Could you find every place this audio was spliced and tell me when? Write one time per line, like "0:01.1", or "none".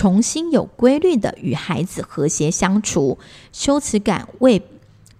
none

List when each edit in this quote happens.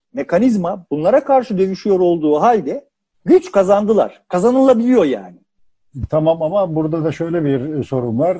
none

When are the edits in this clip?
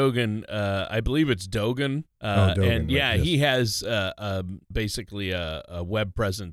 0:02.1
0:04.7

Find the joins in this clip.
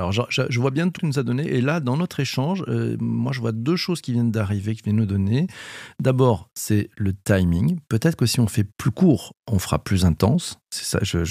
0:01.0
0:08.7

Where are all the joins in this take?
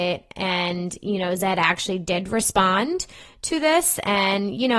none

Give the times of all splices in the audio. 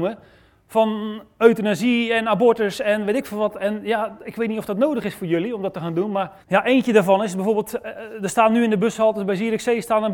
0:06.4

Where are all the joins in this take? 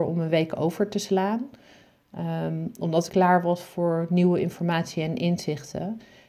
0:03.1

